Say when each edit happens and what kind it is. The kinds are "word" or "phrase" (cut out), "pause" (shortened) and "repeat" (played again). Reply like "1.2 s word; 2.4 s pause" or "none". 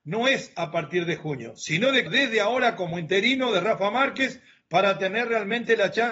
2.1 s word